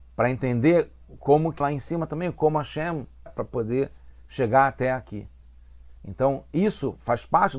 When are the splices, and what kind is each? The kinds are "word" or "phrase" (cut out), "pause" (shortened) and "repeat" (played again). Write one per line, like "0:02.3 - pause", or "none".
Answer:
0:01.6 - word
0:03.3 - word
0:06.0 - pause